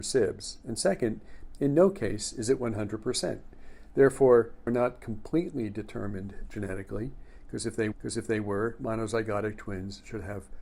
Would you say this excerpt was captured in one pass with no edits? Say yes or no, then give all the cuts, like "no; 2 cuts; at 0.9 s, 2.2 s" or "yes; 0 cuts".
no; 2 cuts; at 4.7 s, 7.9 s